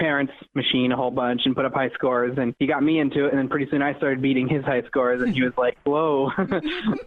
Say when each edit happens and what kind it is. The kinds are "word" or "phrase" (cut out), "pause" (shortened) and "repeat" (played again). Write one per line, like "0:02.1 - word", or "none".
none